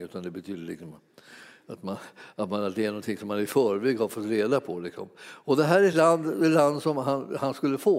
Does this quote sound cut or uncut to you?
uncut